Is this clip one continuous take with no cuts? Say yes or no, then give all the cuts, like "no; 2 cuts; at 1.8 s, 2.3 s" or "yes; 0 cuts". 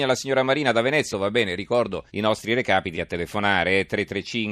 no; 3 cuts; at 1.1 s, 2.1 s, 2.9 s